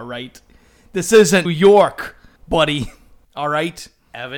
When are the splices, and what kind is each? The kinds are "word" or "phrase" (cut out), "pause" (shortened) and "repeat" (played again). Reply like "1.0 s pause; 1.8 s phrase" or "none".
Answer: 1.4 s word; 2.4 s pause